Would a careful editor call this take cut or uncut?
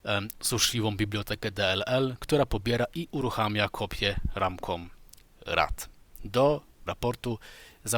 cut